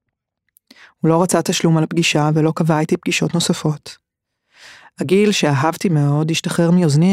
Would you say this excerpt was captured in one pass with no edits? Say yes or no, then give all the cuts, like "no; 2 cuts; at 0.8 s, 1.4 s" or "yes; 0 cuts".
yes; 0 cuts